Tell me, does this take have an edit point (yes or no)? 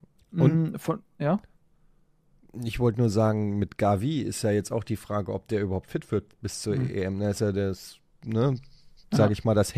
no